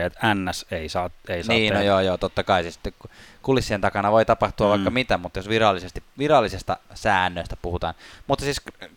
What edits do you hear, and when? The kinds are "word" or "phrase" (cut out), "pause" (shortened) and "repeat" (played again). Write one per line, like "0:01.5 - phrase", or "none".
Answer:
none